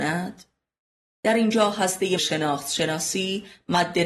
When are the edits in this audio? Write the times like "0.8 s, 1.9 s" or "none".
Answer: 2.2 s